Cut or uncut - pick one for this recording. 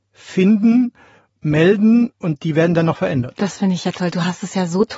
uncut